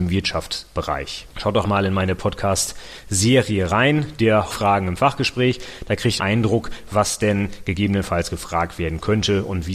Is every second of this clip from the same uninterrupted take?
no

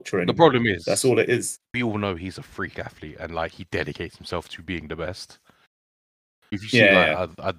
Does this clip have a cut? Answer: no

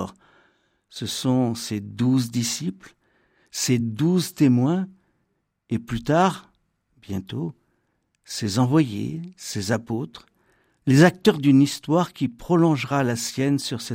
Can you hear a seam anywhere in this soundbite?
no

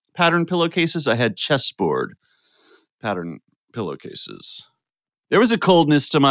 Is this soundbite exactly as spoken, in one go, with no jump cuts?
yes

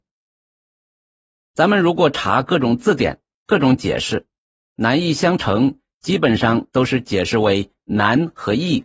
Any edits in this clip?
no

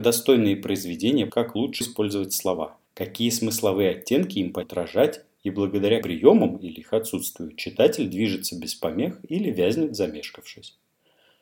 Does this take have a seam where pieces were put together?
yes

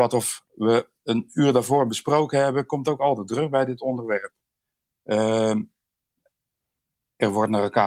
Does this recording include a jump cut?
no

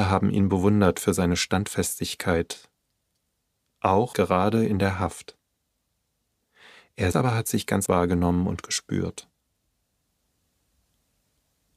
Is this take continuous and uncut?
no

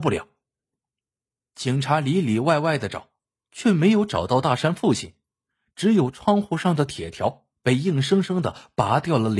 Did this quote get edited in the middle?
no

